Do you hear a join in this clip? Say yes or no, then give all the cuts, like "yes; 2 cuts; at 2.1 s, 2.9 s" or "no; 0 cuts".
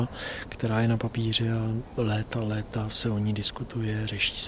no; 0 cuts